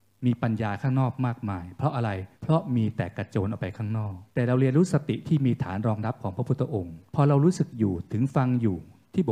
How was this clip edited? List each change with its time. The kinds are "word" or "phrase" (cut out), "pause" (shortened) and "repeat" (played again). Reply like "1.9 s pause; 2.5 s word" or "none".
2.3 s pause; 4.3 s pause; 7.1 s pause